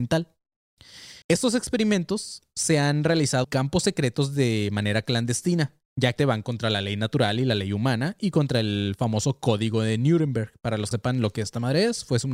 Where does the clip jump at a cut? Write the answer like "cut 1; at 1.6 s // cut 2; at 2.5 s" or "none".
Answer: cut 1; at 1.2 s // cut 2; at 3.4 s // cut 3; at 5.8 s // cut 4; at 6.2 s // cut 5; at 10.9 s